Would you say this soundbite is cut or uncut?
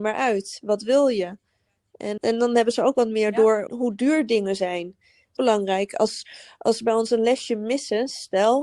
cut